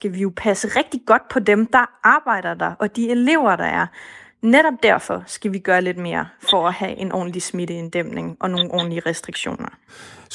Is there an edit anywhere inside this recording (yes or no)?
no